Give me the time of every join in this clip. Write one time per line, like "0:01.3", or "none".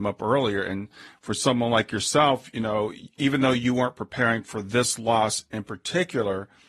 none